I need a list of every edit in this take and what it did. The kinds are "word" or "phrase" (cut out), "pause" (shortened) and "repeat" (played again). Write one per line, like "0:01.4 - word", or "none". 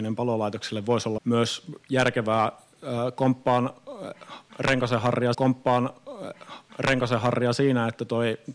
0:01.2 - word
0:05.3 - repeat